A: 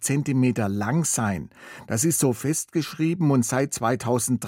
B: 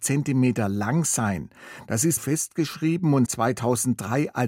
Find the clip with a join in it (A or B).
B